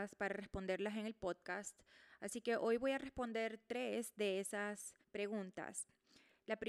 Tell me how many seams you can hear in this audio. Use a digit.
1